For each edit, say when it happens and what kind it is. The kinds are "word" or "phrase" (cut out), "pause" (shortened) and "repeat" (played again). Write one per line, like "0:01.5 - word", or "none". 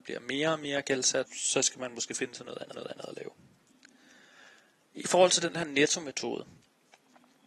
0:01.2 - word
0:02.7 - repeat